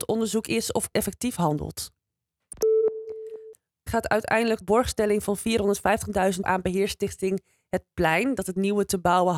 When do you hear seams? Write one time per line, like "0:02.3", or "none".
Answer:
0:00.9
0:03.9
0:04.6
0:06.4